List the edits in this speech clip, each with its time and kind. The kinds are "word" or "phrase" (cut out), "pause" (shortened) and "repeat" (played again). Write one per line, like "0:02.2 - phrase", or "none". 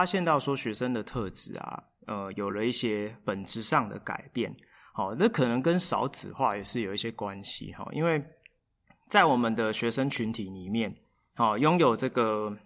none